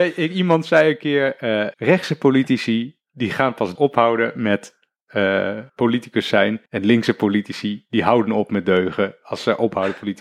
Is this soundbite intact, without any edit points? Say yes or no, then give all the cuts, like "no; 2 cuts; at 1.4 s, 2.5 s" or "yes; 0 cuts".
no; 4 cuts; at 1.7 s, 3.8 s, 5.7 s, 6.7 s